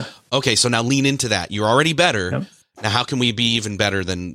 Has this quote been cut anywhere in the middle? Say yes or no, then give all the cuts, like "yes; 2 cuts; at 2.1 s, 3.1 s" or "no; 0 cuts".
no; 0 cuts